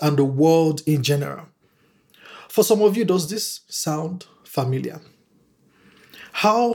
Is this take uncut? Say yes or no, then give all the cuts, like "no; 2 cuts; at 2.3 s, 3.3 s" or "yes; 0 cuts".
yes; 0 cuts